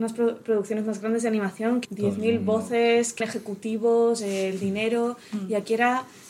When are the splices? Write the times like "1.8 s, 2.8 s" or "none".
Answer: 1.8 s, 3.2 s